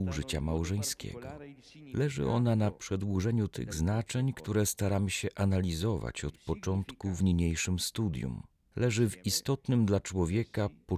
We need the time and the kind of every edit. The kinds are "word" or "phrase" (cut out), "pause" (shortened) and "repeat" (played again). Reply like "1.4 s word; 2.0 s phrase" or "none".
none

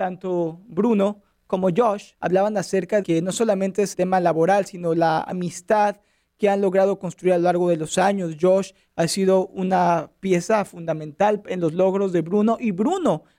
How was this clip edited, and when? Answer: 2.1 s pause; 3.0 s word; 3.9 s word

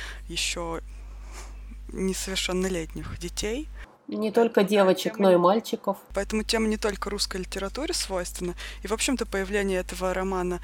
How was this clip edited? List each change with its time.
3.9 s pause; 6.1 s pause

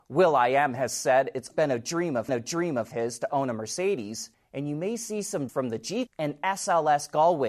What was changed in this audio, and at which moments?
1.5 s word; 2.3 s repeat; 4.3 s pause; 5.5 s phrase; 6.1 s word

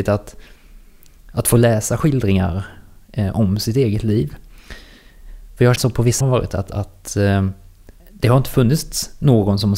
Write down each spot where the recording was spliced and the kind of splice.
5.8 s word; 6.2 s phrase; 8.0 s pause

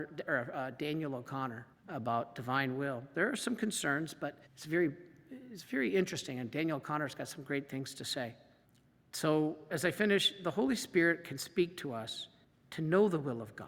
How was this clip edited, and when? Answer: 1.7 s pause; 4.5 s pause; 8.6 s pause; 12.4 s pause

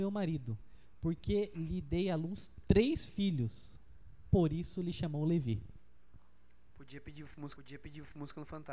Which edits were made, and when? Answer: 7.6 s repeat

